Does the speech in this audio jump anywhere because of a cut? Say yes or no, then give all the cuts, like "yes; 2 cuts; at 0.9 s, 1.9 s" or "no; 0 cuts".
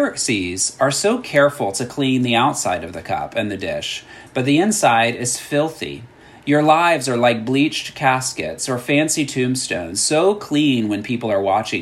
no; 0 cuts